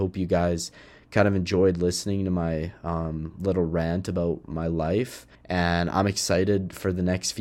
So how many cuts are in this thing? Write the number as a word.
one